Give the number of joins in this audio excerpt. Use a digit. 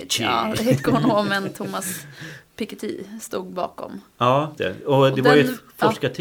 1